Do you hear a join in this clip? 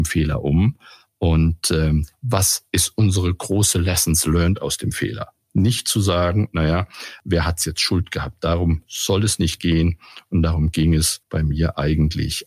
yes; 1 cut; at 11.2 s

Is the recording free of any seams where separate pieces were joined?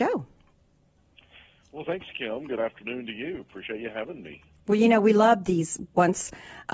yes; 0 cuts

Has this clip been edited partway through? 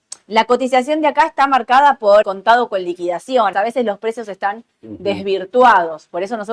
yes; 2 cuts; at 2.2 s, 3.5 s

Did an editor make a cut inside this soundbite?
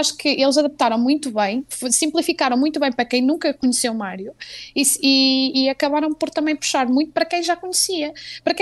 no; 0 cuts

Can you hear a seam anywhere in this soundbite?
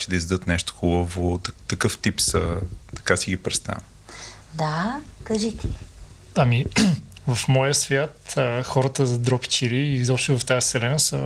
yes; 1 cut; at 4.4 s

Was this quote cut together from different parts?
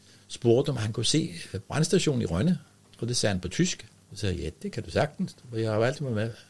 yes; 2 cuts; at 2.8 s, 4.0 s

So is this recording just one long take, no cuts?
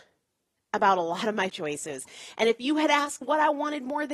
no; 2 cuts; at 1.5 s, 3.2 s

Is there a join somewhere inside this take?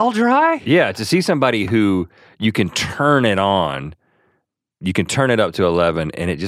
no; 0 cuts

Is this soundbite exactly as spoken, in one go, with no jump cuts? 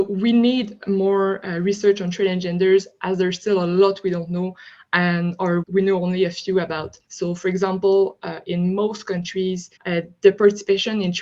no; 3 cuts; at 5.6 s, 7.0 s, 9.8 s

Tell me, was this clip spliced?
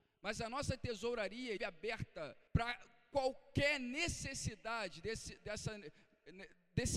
yes; 2 cuts; at 1.6 s, 2.5 s

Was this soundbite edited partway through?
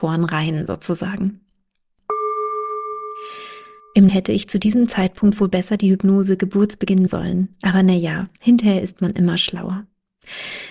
yes; 2 cuts; at 4.1 s, 7.1 s

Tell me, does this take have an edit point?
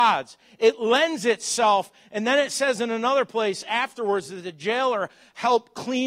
no; 0 cuts

